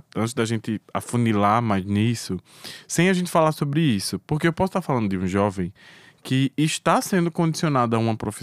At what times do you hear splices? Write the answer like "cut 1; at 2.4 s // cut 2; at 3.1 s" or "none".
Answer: none